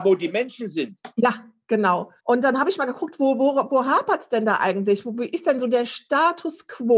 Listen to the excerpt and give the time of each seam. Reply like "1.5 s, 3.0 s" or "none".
2.2 s